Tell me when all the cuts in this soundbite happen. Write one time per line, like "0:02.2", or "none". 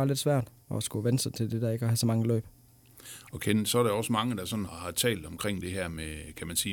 0:04.7